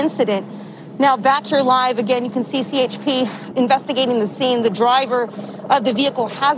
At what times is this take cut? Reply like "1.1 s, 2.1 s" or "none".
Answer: 3.5 s